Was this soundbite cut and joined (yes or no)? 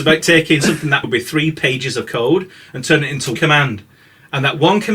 yes